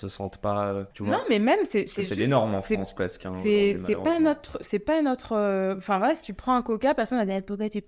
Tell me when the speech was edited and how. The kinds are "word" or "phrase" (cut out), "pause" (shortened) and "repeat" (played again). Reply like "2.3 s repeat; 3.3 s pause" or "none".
0.9 s pause